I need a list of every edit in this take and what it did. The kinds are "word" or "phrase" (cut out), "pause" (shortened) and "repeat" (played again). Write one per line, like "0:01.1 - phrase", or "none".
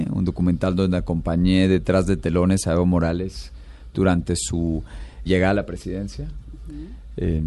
0:05.3 - word